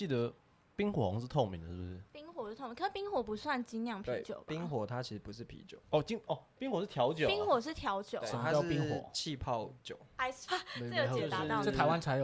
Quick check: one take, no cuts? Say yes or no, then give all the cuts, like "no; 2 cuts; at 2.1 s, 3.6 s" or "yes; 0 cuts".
no; 5 cuts; at 2.1 s, 5.8 s, 6.6 s, 9.8 s, 10.5 s